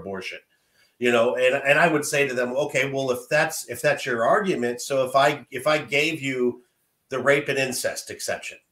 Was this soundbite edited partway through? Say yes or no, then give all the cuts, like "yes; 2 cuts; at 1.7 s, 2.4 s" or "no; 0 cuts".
no; 0 cuts